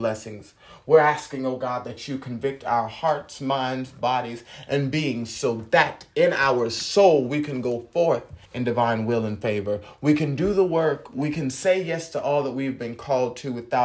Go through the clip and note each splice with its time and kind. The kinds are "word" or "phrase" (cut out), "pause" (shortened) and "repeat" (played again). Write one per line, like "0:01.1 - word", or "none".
0:08.5 - pause

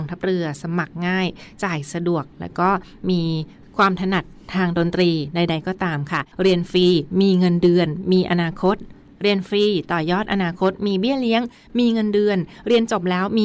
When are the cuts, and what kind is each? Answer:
0:06.3 - pause

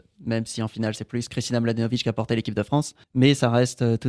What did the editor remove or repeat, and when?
0:03.0 - pause

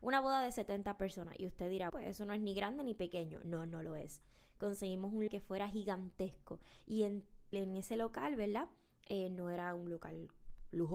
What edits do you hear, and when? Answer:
0:01.9 - word
0:05.3 - word
0:07.5 - word

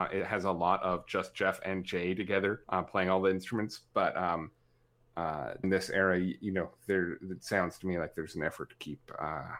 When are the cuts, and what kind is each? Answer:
0:02.6 - pause
0:05.6 - word

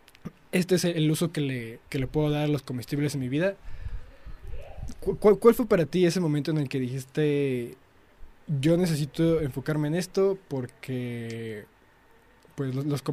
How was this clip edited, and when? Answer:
0:01.9 - pause

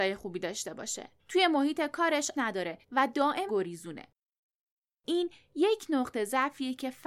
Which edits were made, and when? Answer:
0:01.2 - pause
0:02.3 - word
0:02.8 - pause
0:03.5 - phrase

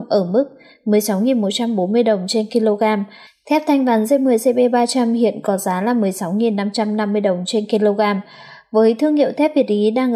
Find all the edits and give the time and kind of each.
none

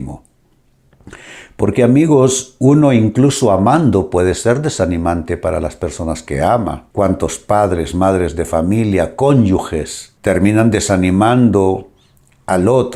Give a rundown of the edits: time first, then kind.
0:06.9 - pause
0:10.2 - pause

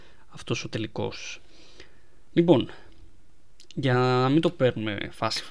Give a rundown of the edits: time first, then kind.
none

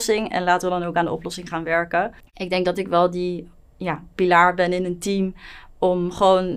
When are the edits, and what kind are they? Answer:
none

